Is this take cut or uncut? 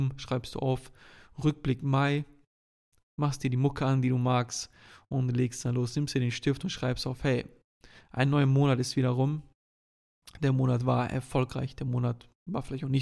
uncut